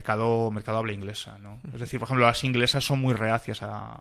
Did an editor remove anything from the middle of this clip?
no; 0 cuts

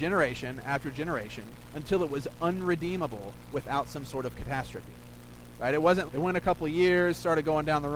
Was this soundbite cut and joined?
yes; 1 cut; at 6.1 s

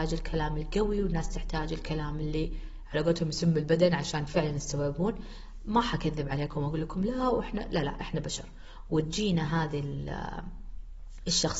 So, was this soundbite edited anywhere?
no; 0 cuts

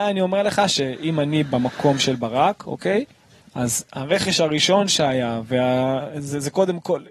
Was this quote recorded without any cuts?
yes; 0 cuts

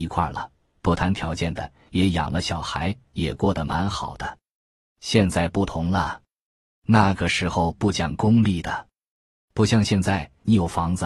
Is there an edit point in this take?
no; 0 cuts

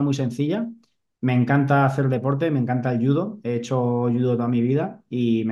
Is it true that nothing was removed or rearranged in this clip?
yes; 0 cuts

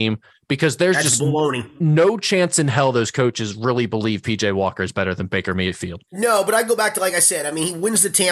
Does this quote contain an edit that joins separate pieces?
yes; 1 cut; at 6.1 s

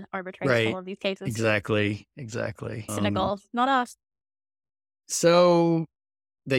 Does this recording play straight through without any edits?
yes; 0 cuts

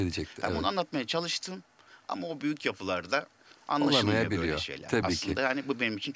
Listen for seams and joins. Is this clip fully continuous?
yes; 0 cuts

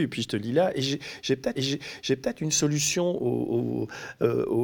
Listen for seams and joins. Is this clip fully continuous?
no; 1 cut; at 1.5 s

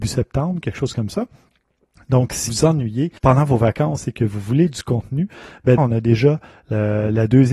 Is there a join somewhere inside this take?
yes; 3 cuts; at 2.5 s, 3.2 s, 5.8 s

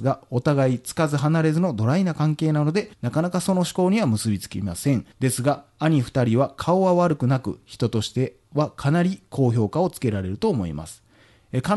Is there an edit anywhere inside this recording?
yes; 2 cuts; at 2.9 s, 5.1 s

